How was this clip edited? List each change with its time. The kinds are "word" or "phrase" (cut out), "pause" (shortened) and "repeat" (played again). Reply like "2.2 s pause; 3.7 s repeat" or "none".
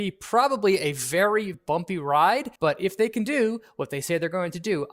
1.5 s word; 2.6 s pause